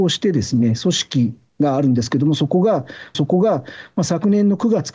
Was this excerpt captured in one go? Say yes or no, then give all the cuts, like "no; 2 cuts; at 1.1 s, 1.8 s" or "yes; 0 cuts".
no; 1 cut; at 3.1 s